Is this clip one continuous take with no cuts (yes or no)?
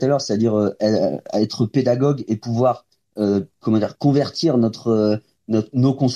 yes